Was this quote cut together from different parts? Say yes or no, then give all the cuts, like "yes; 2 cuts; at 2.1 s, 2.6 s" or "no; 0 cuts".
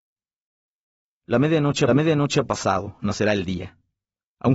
yes; 1 cut; at 1.9 s